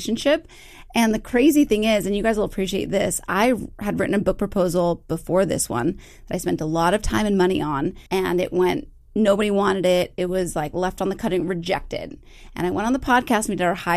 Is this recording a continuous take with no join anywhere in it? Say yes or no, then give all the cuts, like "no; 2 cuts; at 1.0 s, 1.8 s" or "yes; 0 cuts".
no; 1 cut; at 8.1 s